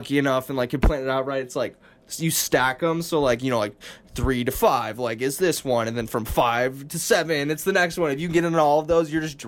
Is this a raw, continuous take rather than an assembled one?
yes; 0 cuts

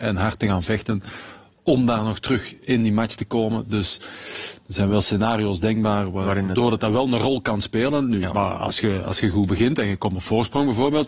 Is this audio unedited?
yes; 0 cuts

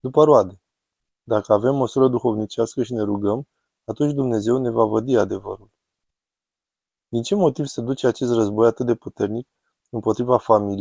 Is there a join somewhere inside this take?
no; 0 cuts

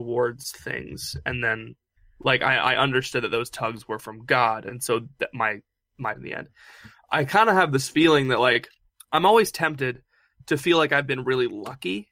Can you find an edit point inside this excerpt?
yes; 3 cuts; at 2.0 s, 6.1 s, 8.9 s

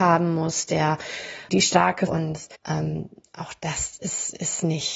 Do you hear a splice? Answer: yes; 3 cuts; at 1.5 s, 2.1 s, 2.5 s

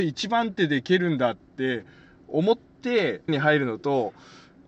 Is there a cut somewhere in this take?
yes; 1 cut; at 3.3 s

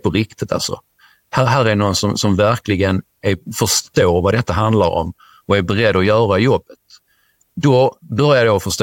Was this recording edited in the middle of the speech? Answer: no; 0 cuts

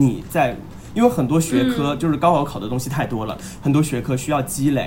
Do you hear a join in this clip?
no; 0 cuts

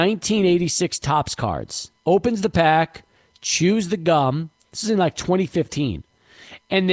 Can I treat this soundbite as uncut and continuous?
no; 1 cut; at 2.0 s

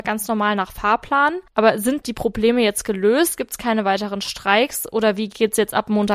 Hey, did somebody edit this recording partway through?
yes; 2 cuts; at 1.5 s, 2.0 s

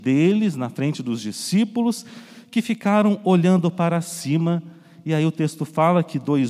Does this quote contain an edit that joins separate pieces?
no; 0 cuts

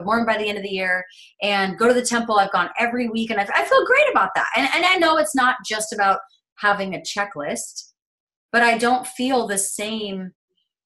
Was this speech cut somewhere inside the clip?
no; 0 cuts

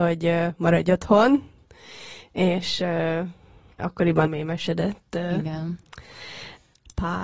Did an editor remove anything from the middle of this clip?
yes; 2 cuts; at 3.8 s, 4.3 s

